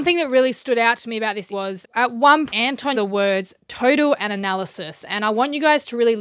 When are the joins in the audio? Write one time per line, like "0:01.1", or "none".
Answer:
0:01.5
0:01.8
0:02.5
0:02.9
0:04.2

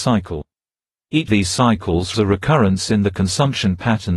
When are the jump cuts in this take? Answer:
0:01.3
0:02.1

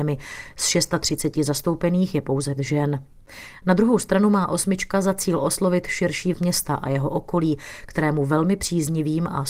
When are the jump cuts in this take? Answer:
0:02.6
0:06.3

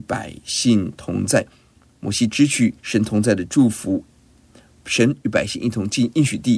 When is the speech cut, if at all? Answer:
0:02.8

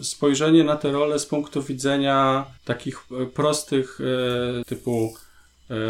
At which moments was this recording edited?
0:02.6
0:04.6

